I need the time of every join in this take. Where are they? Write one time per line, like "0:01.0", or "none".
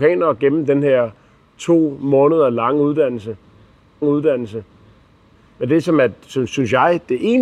0:04.0

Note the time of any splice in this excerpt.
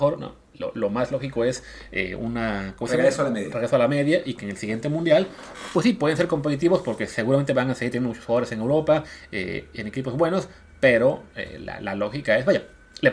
none

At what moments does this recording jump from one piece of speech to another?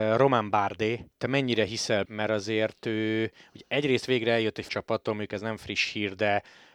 0:01.1
0:02.0
0:04.7

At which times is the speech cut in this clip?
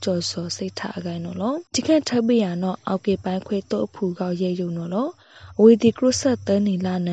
0:01.7

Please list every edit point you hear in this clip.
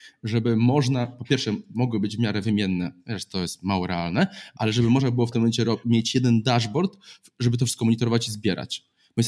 none

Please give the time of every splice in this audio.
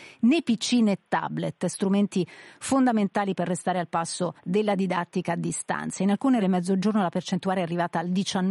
0:04.4
0:06.4

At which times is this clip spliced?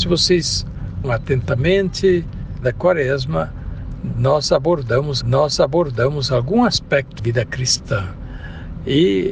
0:01.0
0:02.6
0:05.2
0:07.2

